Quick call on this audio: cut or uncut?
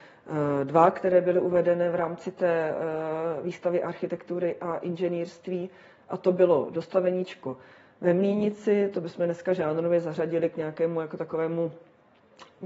uncut